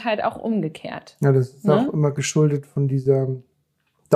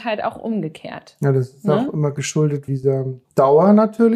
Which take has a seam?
second; 2 cuts; at 2.7 s, 3.2 s

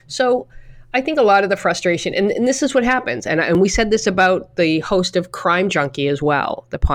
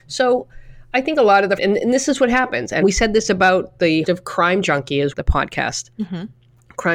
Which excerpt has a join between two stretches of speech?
second; 4 cuts; at 1.6 s, 2.8 s, 4.0 s, 5.1 s

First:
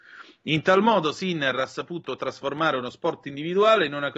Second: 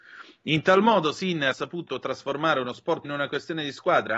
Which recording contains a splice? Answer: second; 2 cuts; at 1.5 s, 3.0 s

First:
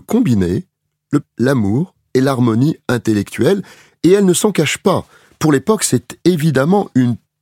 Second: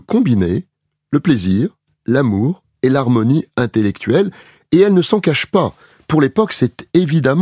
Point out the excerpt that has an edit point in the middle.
first; 1 cut; at 1.2 s

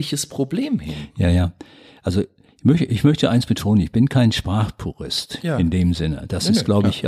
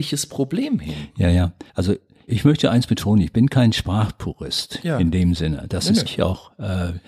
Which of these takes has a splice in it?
second; 3 cuts; at 1.7 s, 2.3 s, 6.1 s

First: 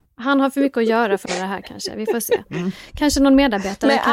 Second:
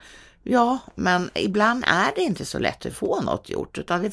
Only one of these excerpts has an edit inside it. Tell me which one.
first; 1 cut; at 1.3 s

